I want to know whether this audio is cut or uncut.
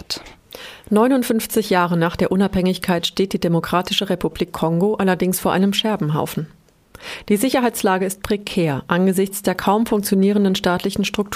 uncut